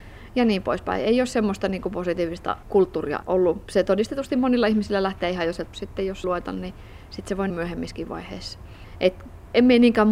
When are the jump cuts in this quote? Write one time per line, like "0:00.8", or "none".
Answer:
0:03.2
0:03.7
0:05.7
0:06.2
0:07.5